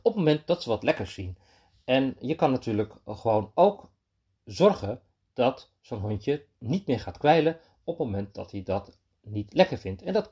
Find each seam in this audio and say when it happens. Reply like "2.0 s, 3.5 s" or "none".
none